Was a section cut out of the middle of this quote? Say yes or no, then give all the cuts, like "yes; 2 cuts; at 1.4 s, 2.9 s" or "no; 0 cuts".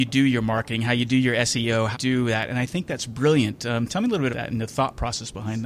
yes; 2 cuts; at 1.9 s, 4.3 s